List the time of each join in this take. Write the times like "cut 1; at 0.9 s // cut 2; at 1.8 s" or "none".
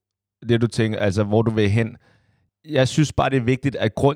cut 1; at 2.5 s

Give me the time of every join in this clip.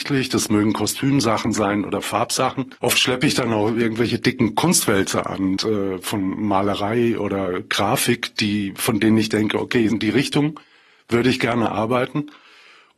cut 1; at 2.8 s // cut 2; at 5.6 s // cut 3; at 9.9 s

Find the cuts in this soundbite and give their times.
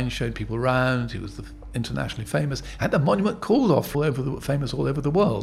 cut 1; at 3.9 s

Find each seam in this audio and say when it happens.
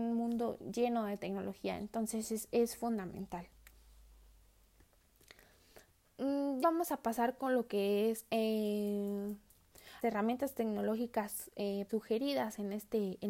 cut 1; at 6.6 s // cut 2; at 10.0 s // cut 3; at 11.9 s

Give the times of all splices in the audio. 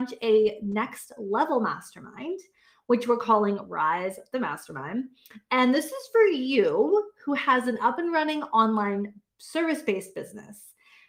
none

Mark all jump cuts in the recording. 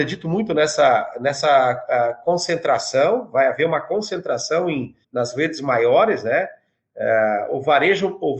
cut 1; at 5.0 s

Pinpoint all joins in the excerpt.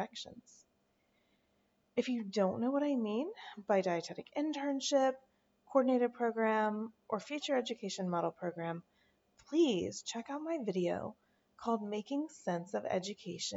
none

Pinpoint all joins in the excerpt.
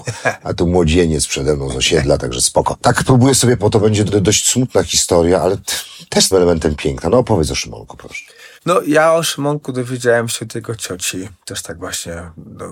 cut 1; at 3.6 s // cut 2; at 4.1 s // cut 3; at 6.3 s // cut 4; at 8.6 s

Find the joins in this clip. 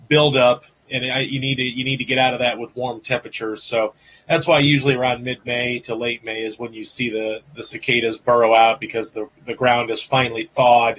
none

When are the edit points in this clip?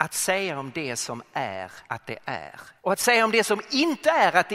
cut 1; at 1.9 s // cut 2; at 2.8 s

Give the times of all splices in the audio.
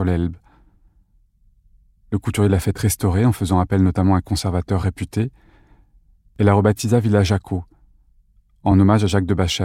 none

